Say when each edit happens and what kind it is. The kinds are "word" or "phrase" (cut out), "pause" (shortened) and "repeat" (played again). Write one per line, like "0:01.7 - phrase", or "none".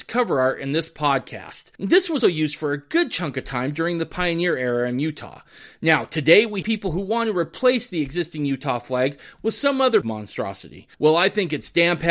0:01.8 - pause
0:02.2 - word
0:06.6 - word
0:10.0 - word
0:10.9 - pause